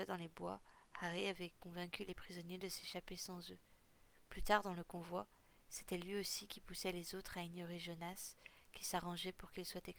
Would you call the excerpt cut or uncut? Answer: uncut